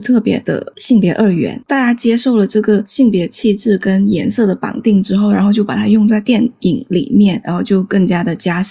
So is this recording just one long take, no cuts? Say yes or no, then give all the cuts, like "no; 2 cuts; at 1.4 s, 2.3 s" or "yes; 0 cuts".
no; 1 cut; at 1.6 s